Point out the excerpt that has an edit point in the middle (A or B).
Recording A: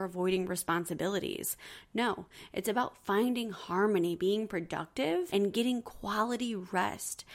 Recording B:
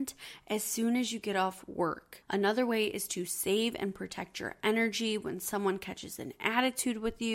A